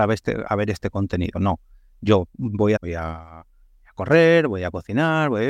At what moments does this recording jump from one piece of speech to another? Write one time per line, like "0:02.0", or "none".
0:02.8